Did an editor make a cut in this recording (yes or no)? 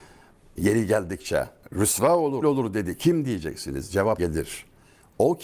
yes